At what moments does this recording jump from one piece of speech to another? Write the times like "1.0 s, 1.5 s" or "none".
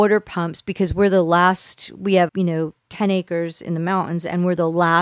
2.3 s, 2.8 s